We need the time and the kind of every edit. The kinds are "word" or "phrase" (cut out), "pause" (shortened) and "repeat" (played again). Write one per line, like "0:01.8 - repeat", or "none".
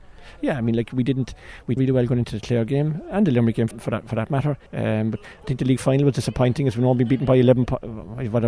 0:01.8 - word
0:03.7 - word
0:04.7 - pause